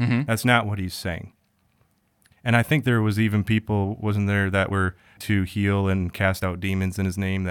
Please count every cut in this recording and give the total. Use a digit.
1